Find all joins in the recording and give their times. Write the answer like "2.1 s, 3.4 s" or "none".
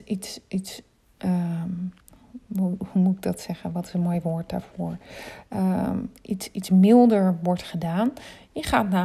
none